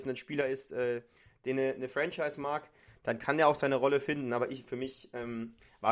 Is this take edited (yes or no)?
no